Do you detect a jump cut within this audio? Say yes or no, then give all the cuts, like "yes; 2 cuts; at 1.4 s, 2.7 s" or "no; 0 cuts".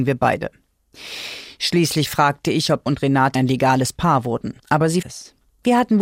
yes; 4 cuts; at 2.9 s, 3.3 s, 4.6 s, 5.0 s